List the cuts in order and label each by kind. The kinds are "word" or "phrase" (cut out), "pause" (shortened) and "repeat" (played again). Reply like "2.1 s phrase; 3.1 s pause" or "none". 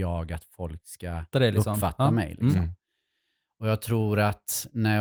1.3 s word